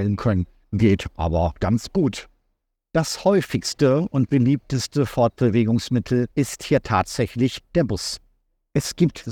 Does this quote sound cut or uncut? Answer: uncut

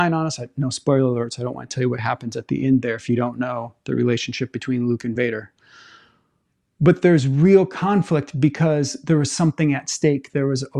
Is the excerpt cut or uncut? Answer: uncut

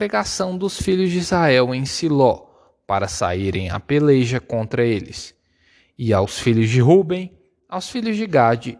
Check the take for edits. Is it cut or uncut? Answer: uncut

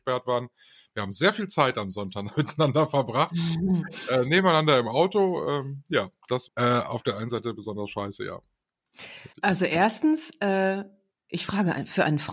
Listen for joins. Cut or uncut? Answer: cut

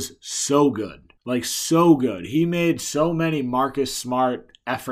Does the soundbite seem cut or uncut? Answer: cut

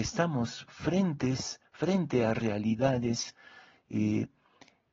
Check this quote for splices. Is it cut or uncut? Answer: uncut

